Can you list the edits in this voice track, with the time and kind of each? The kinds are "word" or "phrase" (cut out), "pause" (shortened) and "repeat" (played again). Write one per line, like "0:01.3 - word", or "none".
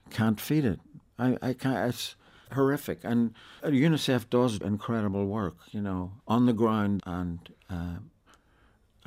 0:02.5 - word
0:03.6 - word
0:04.6 - word
0:06.2 - word
0:07.0 - word